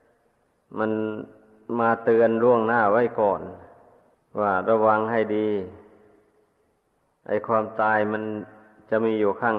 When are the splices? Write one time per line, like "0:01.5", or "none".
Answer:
0:04.1